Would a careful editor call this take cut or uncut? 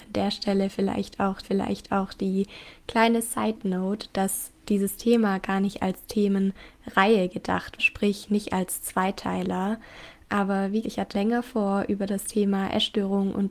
cut